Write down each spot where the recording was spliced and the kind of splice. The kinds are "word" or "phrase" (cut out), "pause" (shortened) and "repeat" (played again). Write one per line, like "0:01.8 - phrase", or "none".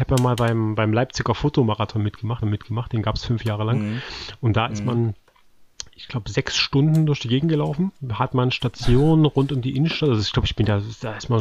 0:02.4 - repeat